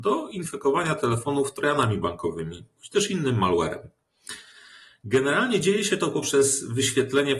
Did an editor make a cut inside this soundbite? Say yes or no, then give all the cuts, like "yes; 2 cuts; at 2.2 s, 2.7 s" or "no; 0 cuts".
no; 0 cuts